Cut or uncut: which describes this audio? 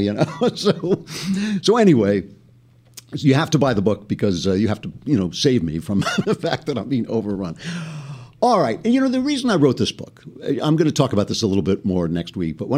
cut